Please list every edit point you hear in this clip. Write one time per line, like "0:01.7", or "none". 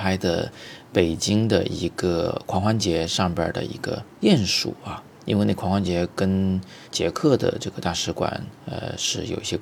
0:04.1
0:05.1
0:06.8
0:08.6